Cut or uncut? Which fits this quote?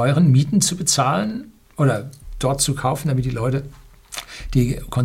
uncut